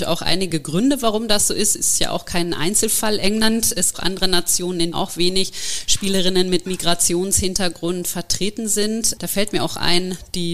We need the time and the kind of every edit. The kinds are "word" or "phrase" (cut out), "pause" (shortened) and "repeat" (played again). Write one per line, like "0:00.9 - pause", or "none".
0:03.9 - phrase
0:04.9 - word